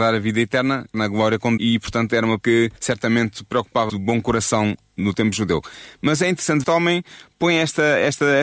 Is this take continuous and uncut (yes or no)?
no